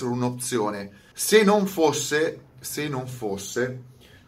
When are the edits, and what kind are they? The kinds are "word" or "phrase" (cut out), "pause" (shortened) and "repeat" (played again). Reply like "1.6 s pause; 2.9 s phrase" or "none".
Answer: 1.1 s pause

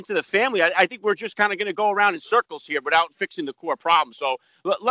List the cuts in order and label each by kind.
none

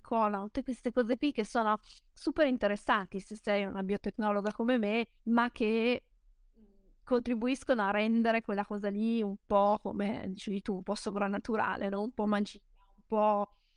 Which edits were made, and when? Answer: 5.2 s pause

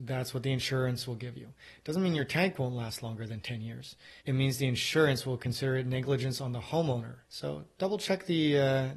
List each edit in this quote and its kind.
4.2 s pause; 7.2 s pause

